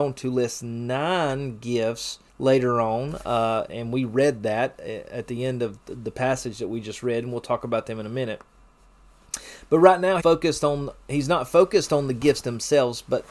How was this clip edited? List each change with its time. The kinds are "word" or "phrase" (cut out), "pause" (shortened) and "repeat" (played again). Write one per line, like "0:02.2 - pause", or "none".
0:02.3 - pause
0:03.7 - word
0:10.2 - word

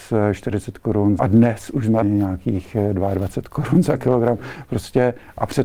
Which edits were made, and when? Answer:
0:01.2 - phrase
0:02.0 - phrase

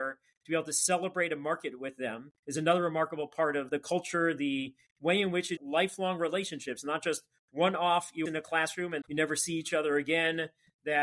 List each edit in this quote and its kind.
0:02.4 - pause
0:03.7 - word
0:05.6 - word
0:08.3 - phrase
0:09.0 - word

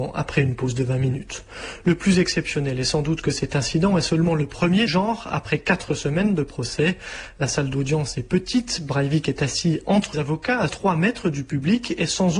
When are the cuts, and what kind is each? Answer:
0:04.9 - word
0:10.1 - word
0:10.7 - word

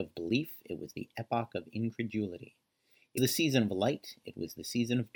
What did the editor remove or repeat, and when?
0:03.2 - word

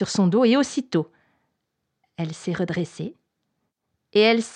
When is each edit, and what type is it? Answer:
none

